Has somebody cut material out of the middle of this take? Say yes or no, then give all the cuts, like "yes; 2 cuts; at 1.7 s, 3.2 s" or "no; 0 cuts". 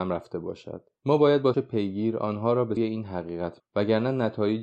yes; 3 cuts; at 1.5 s, 2.8 s, 3.6 s